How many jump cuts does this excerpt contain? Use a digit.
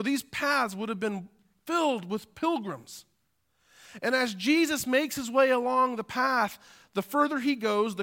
0